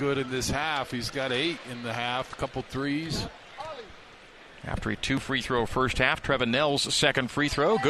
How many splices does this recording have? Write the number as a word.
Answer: zero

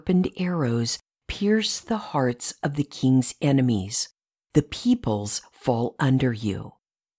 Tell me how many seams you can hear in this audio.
zero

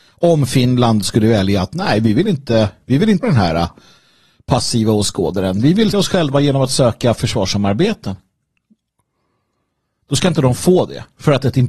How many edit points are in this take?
two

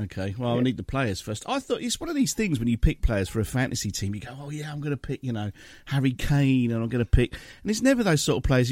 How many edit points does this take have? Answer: zero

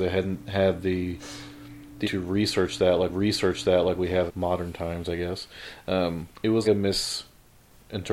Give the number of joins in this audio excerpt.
five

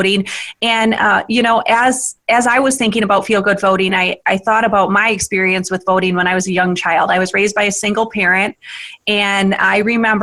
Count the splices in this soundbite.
zero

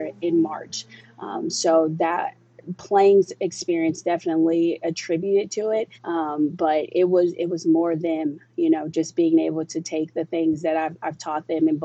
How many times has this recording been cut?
one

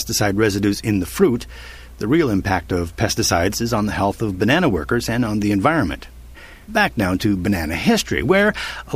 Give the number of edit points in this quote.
zero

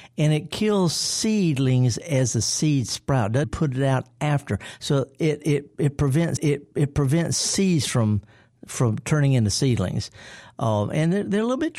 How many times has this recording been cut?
two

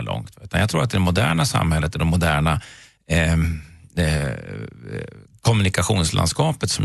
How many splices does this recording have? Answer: one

